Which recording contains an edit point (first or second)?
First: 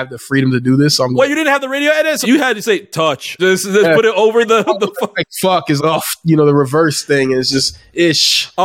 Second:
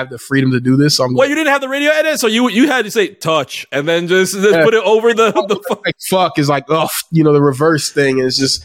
first